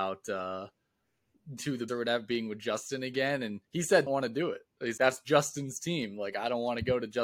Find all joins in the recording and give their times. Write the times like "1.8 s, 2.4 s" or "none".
1.6 s, 1.9 s, 3.6 s, 4.1 s, 5.0 s